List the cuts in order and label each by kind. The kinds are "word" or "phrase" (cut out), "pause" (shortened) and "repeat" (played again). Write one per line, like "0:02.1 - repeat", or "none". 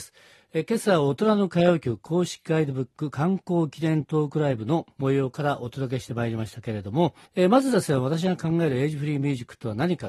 0:04.9 - pause
0:07.3 - pause

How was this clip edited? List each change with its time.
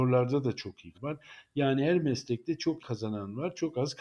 0:00.9 - word
0:02.8 - word

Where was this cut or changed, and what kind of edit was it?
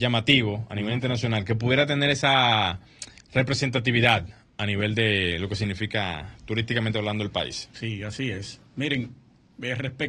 none

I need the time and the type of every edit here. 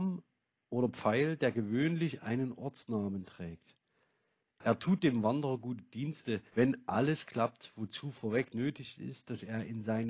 0:06.5 - pause

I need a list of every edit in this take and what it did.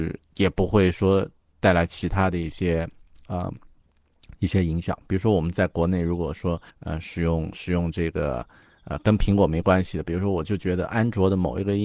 0:06.7 - pause

